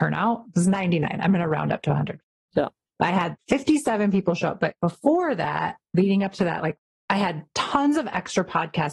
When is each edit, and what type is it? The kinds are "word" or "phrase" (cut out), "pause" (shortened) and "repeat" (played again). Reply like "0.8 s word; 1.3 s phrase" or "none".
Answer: none